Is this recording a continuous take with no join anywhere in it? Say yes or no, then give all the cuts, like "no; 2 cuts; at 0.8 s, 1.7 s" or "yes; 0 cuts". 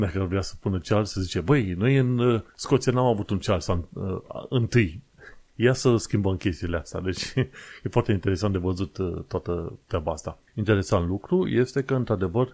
no; 4 cuts; at 2.5 s, 5.5 s, 9.8 s, 10.5 s